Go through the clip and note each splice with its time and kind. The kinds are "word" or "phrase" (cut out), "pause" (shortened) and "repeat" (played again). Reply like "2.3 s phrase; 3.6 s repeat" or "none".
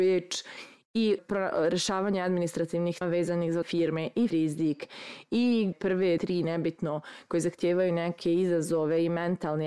1.2 s word; 3.0 s word; 3.6 s word; 4.3 s word; 5.7 s word; 6.2 s word